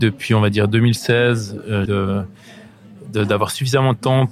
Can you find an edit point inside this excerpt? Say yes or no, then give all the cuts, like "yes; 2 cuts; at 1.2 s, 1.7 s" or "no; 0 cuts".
yes; 1 cut; at 1.9 s